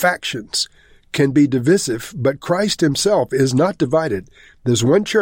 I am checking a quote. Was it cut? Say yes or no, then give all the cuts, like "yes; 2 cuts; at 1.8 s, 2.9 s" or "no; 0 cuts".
no; 0 cuts